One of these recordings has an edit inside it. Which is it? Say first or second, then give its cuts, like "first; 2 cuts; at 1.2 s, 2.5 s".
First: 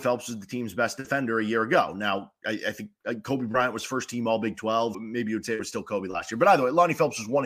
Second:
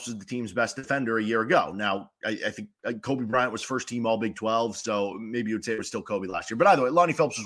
first; 1 cut; at 4.9 s